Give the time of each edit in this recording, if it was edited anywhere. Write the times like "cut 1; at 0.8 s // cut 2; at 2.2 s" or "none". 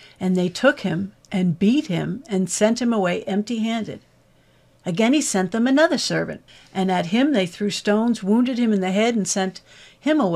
cut 1; at 6.5 s